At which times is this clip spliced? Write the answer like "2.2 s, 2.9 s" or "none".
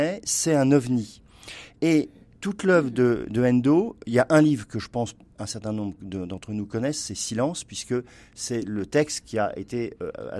none